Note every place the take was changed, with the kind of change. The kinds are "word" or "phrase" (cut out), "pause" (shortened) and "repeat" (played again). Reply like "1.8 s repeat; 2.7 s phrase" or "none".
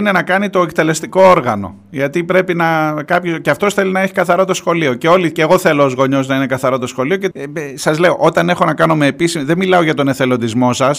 7.3 s word